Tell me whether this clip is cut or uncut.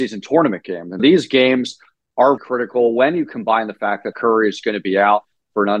cut